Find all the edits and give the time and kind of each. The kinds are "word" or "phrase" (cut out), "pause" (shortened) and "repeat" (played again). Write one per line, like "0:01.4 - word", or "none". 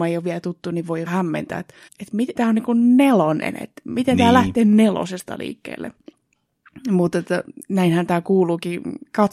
0:01.1 - word
0:01.9 - pause
0:02.3 - word